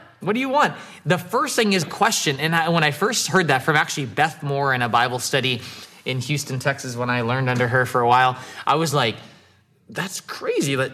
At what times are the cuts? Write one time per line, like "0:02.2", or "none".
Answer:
0:01.8